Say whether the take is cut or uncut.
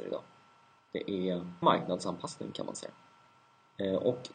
cut